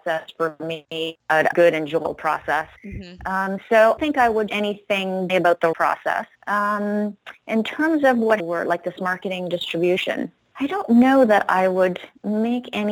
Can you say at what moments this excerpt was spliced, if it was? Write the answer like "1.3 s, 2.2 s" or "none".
1.5 s, 2.8 s, 4.0 s, 4.5 s, 5.3 s, 5.7 s, 6.3 s, 8.4 s, 9.0 s